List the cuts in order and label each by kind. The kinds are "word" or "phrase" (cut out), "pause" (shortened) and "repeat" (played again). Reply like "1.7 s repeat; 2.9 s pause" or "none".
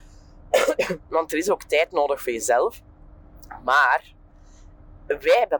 none